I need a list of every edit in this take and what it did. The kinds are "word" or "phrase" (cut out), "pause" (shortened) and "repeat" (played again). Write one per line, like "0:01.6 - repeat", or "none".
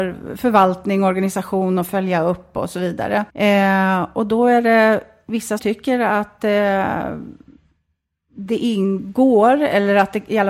0:03.3 - pause
0:05.6 - word